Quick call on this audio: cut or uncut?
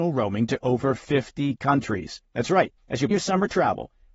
cut